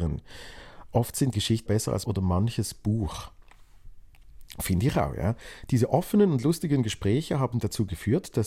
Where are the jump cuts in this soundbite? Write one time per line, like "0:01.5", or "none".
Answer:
0:01.3
0:01.7
0:02.0